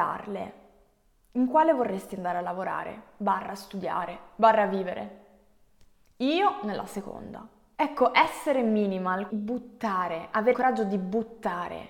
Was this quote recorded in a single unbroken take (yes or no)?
no